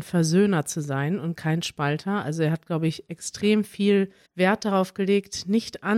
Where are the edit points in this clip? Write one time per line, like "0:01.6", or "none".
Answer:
0:04.3